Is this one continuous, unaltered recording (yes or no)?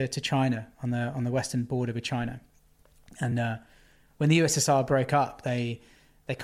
yes